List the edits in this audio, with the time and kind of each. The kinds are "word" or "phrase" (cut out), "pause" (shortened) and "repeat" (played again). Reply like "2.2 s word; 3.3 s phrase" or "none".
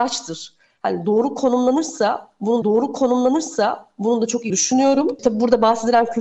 2.6 s repeat; 4.5 s word